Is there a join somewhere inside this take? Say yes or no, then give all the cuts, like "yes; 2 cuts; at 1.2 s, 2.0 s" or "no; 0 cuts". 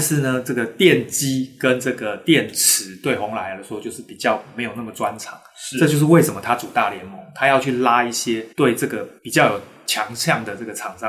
yes; 2 cuts; at 8.5 s, 9.2 s